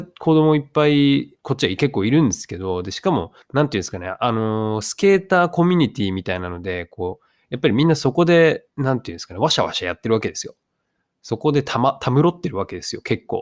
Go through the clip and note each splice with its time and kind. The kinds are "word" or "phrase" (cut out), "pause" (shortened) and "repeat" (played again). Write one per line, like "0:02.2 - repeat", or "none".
0:01.4 - pause
0:03.4 - pause
0:08.7 - pause